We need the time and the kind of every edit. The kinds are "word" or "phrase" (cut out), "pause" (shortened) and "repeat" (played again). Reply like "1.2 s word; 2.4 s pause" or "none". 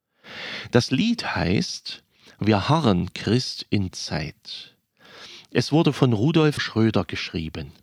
3.9 s word; 6.6 s word